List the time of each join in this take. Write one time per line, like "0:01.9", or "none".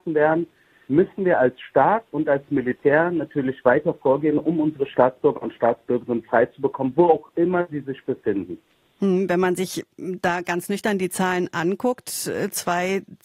none